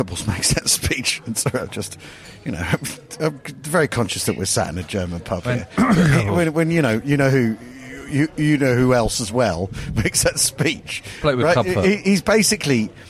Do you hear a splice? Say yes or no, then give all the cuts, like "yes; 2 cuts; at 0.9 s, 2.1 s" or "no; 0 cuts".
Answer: no; 0 cuts